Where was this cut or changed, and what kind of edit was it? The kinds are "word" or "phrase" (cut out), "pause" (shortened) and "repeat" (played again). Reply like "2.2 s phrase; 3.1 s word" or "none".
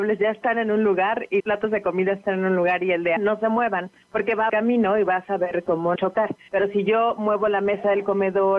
1.4 s word; 3.2 s phrase; 4.5 s phrase; 6.0 s word